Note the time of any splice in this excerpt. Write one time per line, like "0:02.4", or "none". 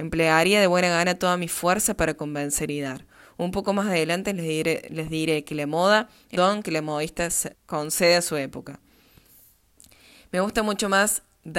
0:06.4
0:07.5